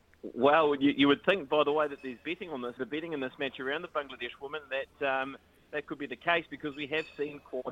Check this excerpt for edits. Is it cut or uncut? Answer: cut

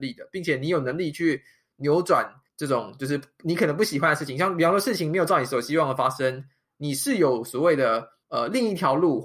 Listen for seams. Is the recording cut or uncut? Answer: cut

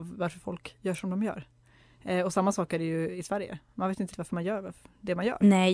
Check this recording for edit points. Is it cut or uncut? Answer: cut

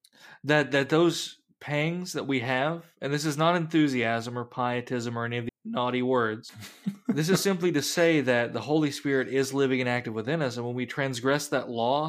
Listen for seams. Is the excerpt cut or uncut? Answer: cut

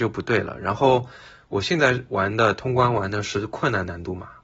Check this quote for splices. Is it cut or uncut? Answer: uncut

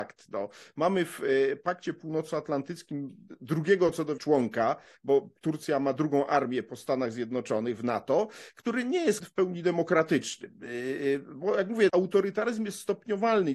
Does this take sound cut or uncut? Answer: cut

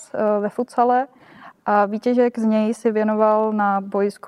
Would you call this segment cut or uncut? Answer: uncut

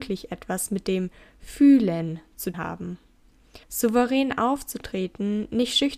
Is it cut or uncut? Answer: cut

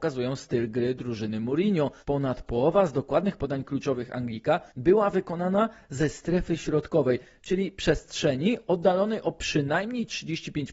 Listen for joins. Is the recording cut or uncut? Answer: cut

